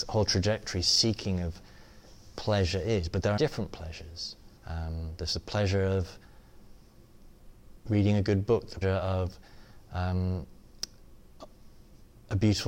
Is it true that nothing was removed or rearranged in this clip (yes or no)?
no